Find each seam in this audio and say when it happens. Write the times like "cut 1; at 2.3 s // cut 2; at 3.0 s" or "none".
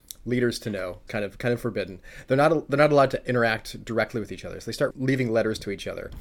cut 1; at 1.1 s // cut 2; at 4.9 s